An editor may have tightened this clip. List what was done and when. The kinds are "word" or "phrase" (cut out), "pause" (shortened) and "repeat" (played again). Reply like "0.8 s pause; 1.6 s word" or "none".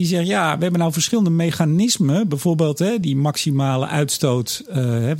none